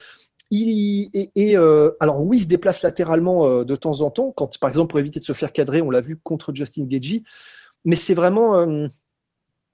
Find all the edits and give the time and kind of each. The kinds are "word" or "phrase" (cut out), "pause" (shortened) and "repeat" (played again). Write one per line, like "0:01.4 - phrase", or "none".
none